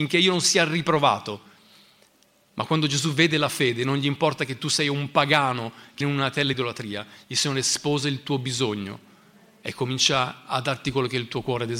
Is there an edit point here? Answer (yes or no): yes